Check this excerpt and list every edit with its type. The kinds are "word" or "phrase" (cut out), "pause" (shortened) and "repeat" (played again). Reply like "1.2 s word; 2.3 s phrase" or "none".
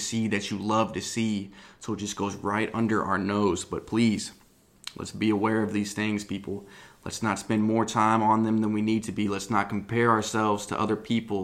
none